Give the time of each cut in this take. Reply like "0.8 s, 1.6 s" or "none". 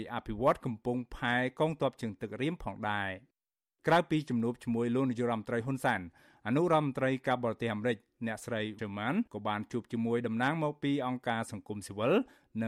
8.8 s, 9.3 s

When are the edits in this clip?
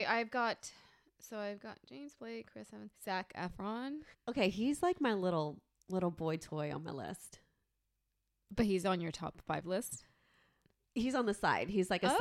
3.0 s, 4.1 s

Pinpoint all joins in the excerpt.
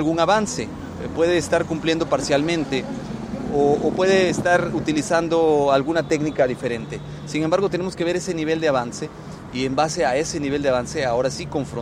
none

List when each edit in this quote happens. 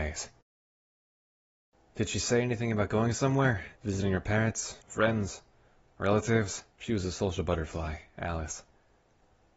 3.8 s, 4.8 s, 6.7 s

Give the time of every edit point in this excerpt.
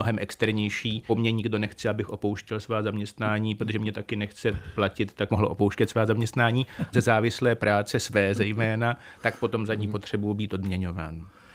1.1 s, 5.3 s, 6.9 s

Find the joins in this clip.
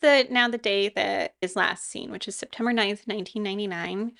1.4 s

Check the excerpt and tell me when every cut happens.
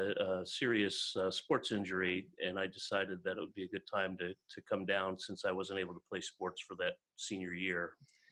none

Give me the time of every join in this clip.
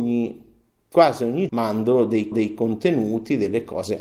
1.5 s, 2.3 s

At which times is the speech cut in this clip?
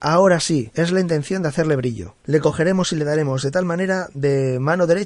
none

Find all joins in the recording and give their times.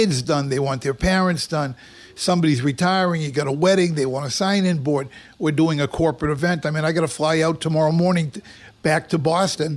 none

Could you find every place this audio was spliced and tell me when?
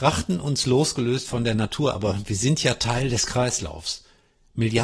none

